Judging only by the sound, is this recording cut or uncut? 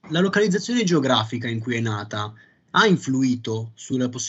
uncut